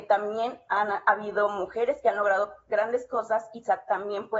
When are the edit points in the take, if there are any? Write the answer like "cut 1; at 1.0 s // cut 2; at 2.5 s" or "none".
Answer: none